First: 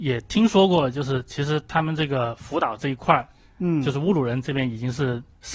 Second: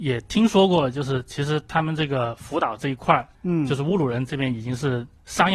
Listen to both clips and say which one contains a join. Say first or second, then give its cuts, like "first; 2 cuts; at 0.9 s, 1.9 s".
second; 1 cut; at 3.3 s